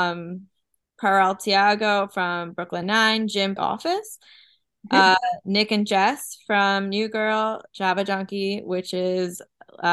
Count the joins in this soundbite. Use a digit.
2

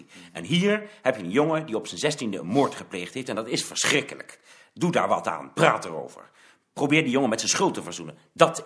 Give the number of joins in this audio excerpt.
0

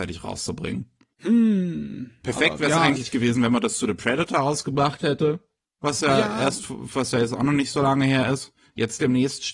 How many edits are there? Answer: 0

